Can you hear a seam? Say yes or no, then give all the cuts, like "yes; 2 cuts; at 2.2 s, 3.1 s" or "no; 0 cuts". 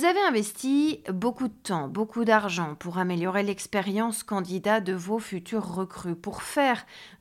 no; 0 cuts